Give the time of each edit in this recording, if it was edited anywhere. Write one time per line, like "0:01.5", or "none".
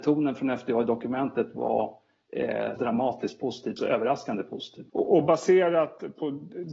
0:02.8
0:03.8
0:04.9